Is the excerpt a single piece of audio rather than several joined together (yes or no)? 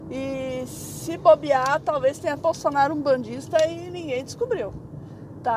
no